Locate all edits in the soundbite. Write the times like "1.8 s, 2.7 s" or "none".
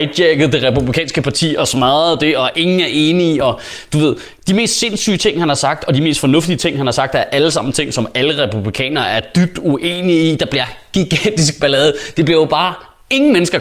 none